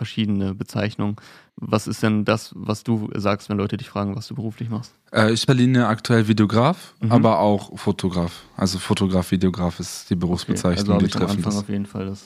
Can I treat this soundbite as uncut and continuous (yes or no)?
no